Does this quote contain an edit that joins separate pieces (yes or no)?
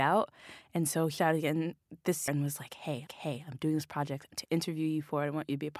yes